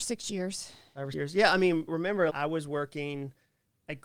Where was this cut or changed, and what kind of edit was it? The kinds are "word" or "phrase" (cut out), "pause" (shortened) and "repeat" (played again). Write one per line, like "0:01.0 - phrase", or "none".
0:01.1 - word
0:01.9 - word
0:02.3 - word